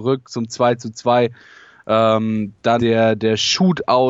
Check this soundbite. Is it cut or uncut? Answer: cut